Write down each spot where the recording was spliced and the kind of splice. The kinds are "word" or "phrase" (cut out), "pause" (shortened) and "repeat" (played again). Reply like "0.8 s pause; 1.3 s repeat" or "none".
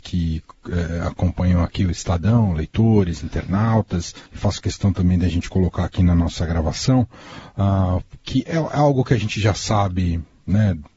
4.3 s pause

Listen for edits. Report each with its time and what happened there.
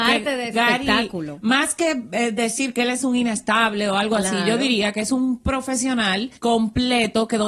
6.4 s pause

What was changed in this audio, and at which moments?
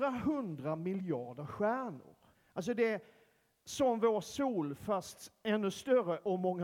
2.3 s pause

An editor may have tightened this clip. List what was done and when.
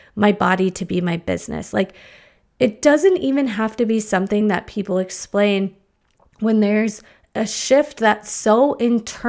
none

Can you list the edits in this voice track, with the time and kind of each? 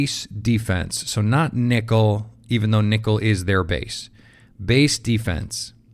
none

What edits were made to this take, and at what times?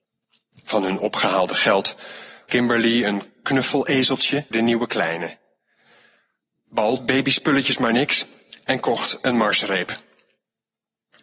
2.5 s word; 4.5 s word; 7.0 s word

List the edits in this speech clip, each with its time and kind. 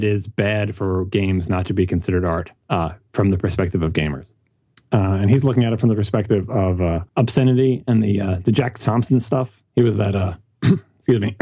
2.6 s pause; 4.7 s pause; 7.1 s pause; 9.7 s pause

